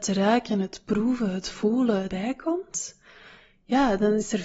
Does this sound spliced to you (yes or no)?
yes